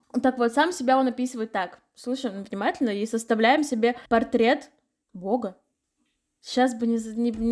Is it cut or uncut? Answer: cut